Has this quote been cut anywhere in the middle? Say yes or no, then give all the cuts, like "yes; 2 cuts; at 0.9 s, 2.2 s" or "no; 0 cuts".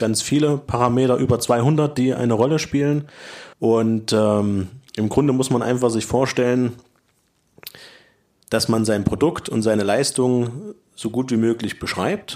yes; 2 cuts; at 3.5 s, 4.9 s